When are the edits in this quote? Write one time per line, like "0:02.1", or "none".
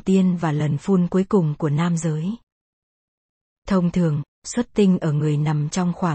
none